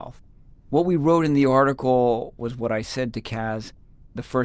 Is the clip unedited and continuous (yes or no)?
yes